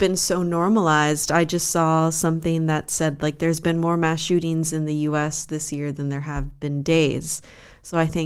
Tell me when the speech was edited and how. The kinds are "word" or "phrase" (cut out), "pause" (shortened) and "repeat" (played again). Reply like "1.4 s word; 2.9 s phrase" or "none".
none